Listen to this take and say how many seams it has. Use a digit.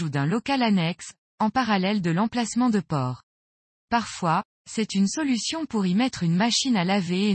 0